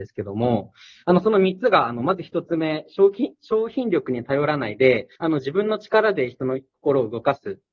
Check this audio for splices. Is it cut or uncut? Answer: cut